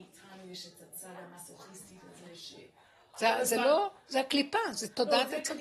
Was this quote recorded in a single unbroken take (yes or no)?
yes